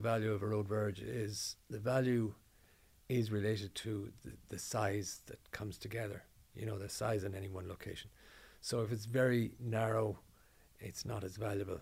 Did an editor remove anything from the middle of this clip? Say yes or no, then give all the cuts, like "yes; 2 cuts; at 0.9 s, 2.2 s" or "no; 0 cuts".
no; 0 cuts